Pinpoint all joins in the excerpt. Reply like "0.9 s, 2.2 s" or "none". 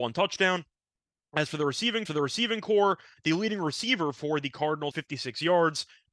2.1 s, 4.9 s